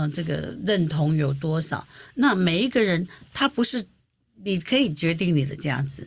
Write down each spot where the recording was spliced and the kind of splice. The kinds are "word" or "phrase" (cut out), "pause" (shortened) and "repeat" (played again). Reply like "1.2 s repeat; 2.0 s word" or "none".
none